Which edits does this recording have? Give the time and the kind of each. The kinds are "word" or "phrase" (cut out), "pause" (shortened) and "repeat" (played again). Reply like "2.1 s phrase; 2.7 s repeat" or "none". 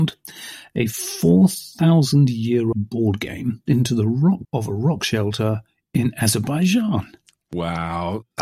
2.7 s word; 3.7 s word; 4.4 s word